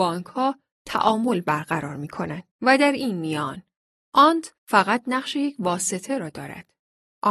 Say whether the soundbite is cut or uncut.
cut